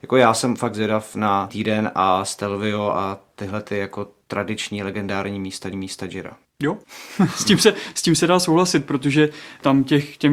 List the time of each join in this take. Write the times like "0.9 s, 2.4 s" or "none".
1.5 s, 5.7 s, 6.8 s